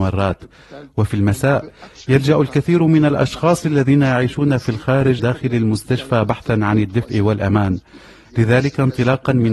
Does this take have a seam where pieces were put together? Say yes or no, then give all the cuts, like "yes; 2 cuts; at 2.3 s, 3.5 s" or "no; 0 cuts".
yes; 1 cut; at 5.2 s